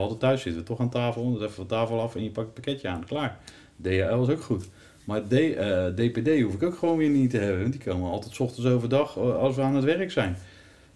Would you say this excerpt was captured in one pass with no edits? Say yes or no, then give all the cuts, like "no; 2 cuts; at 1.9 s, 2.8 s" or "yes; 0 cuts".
yes; 0 cuts